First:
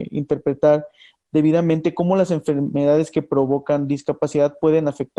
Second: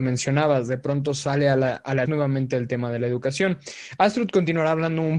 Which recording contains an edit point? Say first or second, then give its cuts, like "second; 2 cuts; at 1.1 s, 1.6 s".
second; 1 cut; at 2.1 s